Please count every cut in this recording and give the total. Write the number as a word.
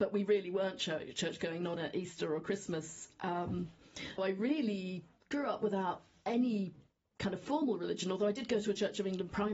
two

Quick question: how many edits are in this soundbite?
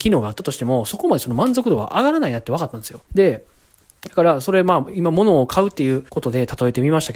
two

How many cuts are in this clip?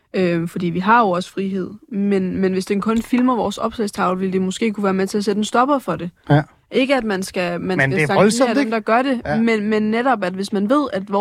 zero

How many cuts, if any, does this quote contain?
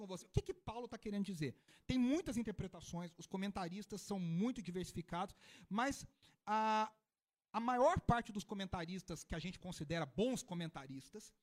zero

